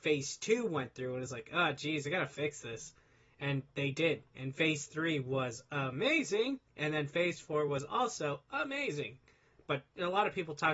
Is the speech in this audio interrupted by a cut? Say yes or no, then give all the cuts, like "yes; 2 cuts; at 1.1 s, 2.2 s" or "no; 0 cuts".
no; 0 cuts